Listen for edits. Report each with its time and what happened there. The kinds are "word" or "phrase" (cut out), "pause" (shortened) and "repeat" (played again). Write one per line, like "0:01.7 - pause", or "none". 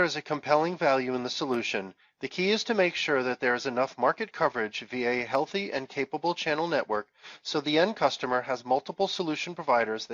none